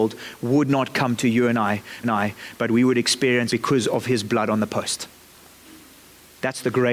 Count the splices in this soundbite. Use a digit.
2